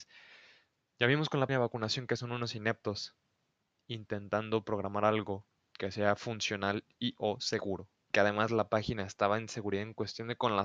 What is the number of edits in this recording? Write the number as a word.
one